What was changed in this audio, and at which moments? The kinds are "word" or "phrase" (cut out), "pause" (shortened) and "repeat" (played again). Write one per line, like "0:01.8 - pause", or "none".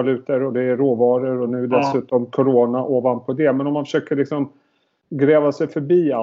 none